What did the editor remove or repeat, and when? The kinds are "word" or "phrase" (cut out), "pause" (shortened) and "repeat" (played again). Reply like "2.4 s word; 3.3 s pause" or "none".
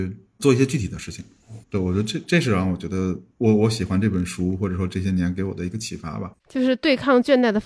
1.6 s pause; 3.3 s pause; 6.3 s word